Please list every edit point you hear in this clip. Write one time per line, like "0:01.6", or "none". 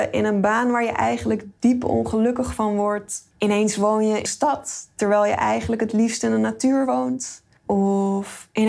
0:04.3